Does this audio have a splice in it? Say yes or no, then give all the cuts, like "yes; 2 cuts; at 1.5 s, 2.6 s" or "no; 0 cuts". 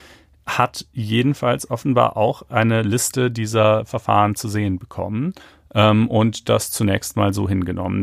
no; 0 cuts